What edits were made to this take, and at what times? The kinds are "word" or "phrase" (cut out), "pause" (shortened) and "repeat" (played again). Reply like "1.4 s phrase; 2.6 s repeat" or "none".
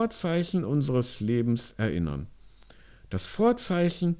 none

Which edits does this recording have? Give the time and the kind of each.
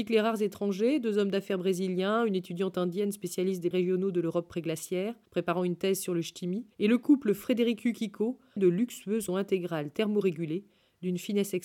3.7 s word; 5.3 s pause; 6.7 s pause; 8.6 s word; 9.3 s word

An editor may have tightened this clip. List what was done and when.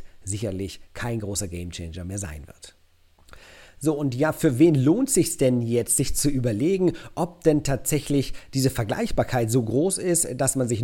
none

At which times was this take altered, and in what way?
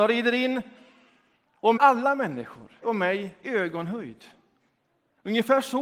1.8 s word; 2.8 s word; 3.4 s word

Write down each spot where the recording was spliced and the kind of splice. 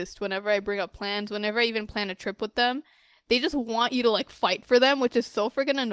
none

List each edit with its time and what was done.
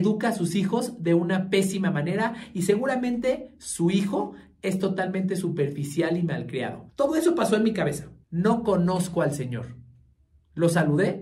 6.9 s pause; 8.2 s pause

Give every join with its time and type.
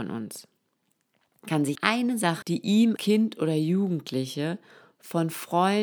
1.8 s word; 2.4 s word; 3.0 s word

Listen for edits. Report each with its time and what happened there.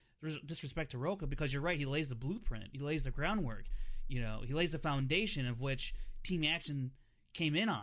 none

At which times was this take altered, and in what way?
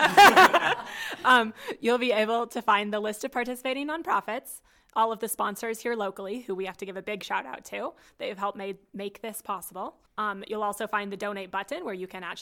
10.1 s pause

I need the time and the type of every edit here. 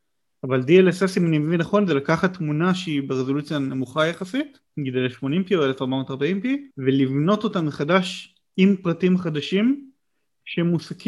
4.7 s pause; 6.7 s pause

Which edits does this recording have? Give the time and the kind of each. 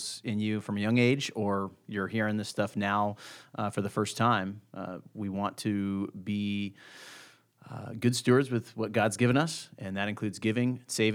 none

